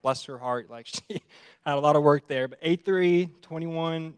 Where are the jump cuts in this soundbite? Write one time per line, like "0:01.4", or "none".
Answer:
none

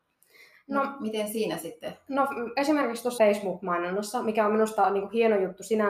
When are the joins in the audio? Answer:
0:03.2

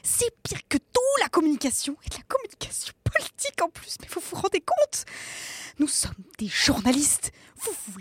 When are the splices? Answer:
none

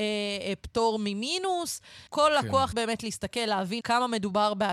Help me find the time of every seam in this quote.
0:02.1
0:02.7
0:03.8

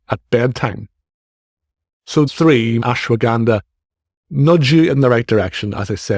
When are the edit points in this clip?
0:02.3
0:02.8

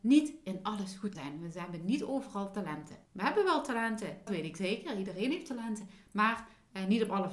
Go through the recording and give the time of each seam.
0:01.1
0:03.1
0:04.3

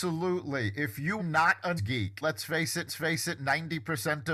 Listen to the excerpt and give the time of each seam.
0:01.2
0:01.8
0:02.2
0:02.9

